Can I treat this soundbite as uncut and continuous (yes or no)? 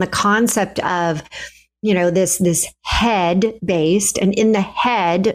yes